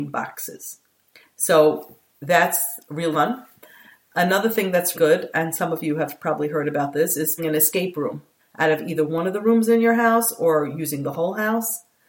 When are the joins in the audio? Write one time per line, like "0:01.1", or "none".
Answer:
0:03.1
0:04.9
0:07.4
0:08.4